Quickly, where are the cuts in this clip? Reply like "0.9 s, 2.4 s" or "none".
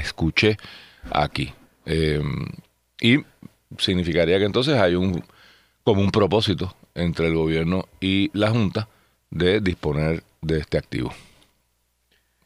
none